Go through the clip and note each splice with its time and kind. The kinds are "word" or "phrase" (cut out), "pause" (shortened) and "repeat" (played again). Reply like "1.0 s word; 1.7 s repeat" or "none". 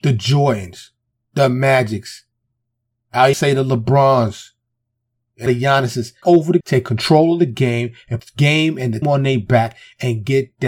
3.3 s word; 5.5 s word; 6.2 s word; 6.6 s word; 8.2 s word; 9.0 s word